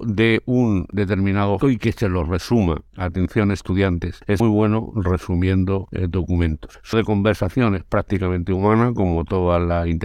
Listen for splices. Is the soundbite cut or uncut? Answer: cut